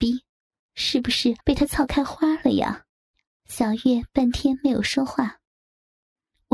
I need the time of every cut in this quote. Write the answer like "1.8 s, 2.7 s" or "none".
1.4 s, 3.1 s